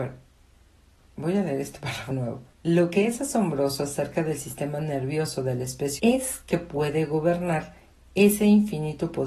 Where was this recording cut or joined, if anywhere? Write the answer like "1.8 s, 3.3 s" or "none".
2.1 s, 2.5 s, 6.0 s